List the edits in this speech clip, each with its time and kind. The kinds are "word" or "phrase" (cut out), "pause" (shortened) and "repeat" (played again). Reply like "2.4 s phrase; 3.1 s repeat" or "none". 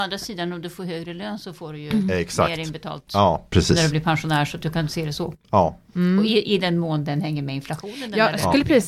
4.9 s word